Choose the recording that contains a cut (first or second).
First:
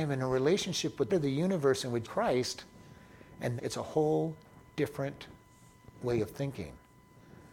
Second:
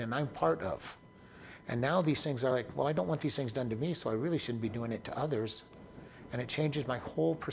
first